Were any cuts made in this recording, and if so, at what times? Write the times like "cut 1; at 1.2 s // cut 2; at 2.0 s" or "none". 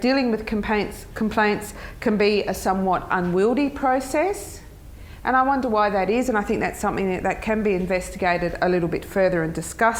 none

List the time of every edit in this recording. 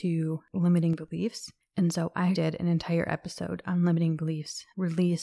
cut 1; at 2.3 s

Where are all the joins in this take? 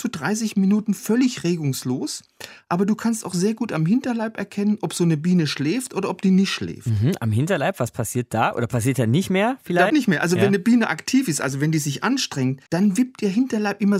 cut 1; at 9.9 s // cut 2; at 12.7 s

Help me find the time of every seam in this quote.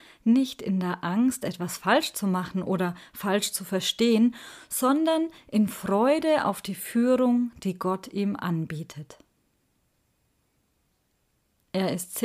none

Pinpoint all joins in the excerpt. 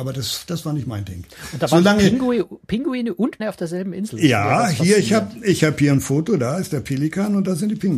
cut 1; at 3.4 s

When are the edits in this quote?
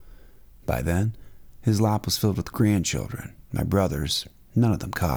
cut 1; at 3.4 s

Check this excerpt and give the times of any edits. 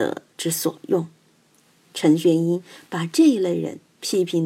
none

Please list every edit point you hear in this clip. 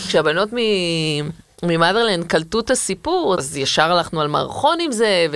cut 1; at 3.4 s

